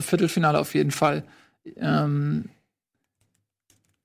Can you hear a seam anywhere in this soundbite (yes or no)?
no